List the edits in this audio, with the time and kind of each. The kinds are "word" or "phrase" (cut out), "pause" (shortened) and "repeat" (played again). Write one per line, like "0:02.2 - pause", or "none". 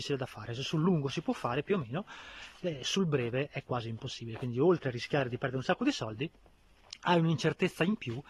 none

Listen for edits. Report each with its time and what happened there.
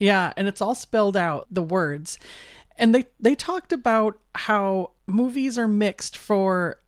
0:01.4 - word
0:05.0 - pause

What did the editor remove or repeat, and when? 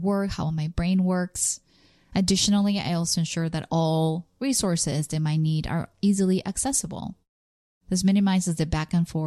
none

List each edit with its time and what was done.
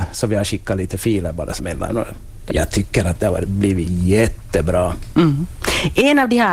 0:01.6 - word
0:02.5 - word

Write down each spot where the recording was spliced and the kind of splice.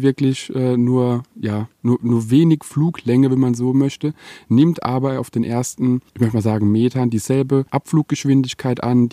0:01.7 - pause
0:06.1 - pause
0:07.7 - pause

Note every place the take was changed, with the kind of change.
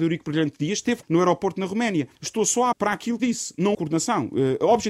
0:01.0 - word
0:02.2 - pause
0:02.7 - word
0:03.2 - phrase
0:03.7 - word

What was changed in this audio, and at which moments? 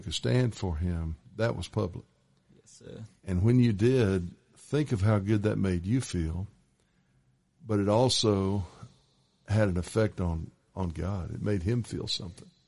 none

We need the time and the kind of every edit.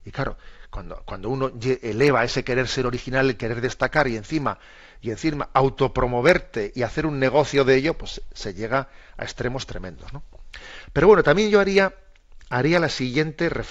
none

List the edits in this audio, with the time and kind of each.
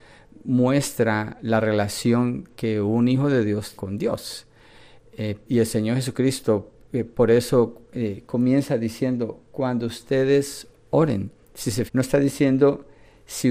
0:03.8 - word
0:05.5 - word
0:11.9 - word

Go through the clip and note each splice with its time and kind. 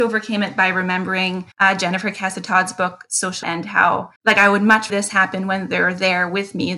0:01.5 - pause
0:03.4 - word
0:04.2 - pause
0:04.9 - word

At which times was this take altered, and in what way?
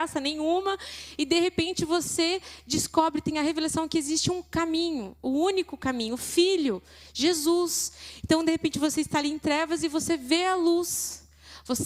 none

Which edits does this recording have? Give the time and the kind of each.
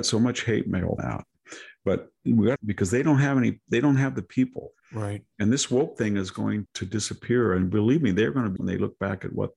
0:01.0 - word
0:02.2 - pause
0:02.6 - phrase
0:04.8 - pause
0:06.7 - word
0:08.6 - word

